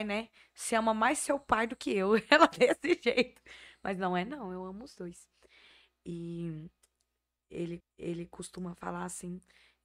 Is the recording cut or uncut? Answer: cut